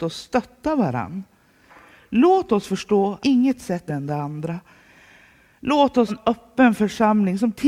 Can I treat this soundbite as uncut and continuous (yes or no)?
no